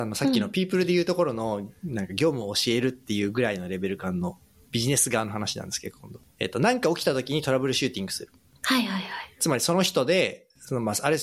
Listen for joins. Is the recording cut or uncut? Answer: uncut